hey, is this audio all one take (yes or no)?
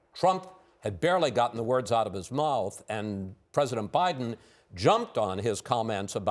yes